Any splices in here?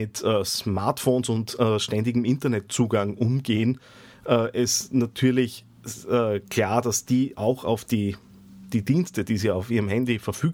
no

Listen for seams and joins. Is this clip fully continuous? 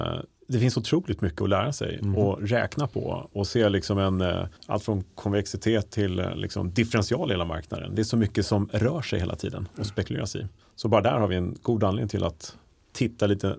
no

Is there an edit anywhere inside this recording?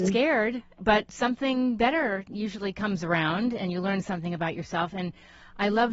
no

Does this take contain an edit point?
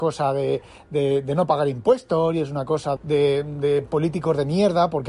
yes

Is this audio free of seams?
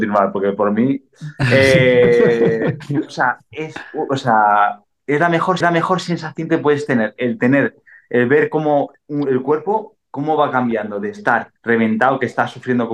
no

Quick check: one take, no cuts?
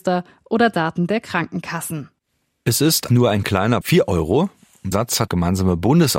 no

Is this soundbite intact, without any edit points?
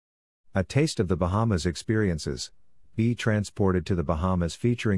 yes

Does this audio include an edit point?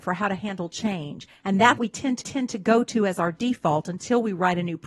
yes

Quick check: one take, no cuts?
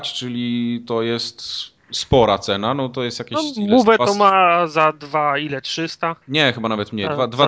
no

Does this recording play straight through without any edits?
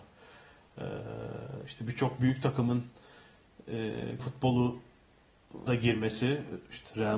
no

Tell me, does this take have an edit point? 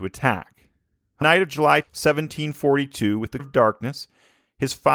yes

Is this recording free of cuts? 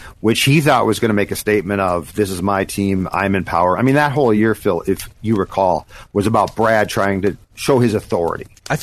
yes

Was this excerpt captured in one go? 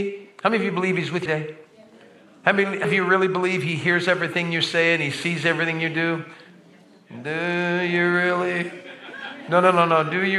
no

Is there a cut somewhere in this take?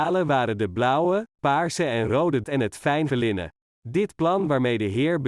yes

